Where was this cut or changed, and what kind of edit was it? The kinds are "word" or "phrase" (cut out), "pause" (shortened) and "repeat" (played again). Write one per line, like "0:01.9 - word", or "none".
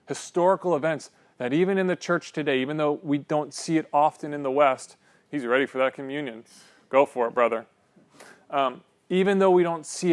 none

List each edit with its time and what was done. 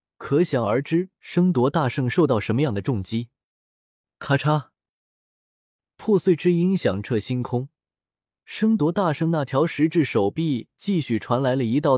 none

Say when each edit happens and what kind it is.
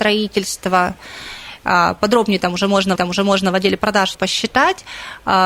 0:03.0 - repeat
0:04.1 - word

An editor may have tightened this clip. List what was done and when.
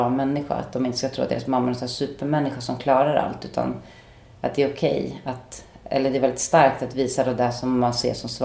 none

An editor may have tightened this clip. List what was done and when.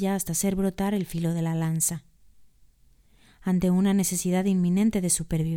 none

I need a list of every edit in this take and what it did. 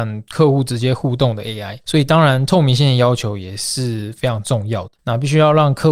0:01.8 - pause
0:05.0 - pause

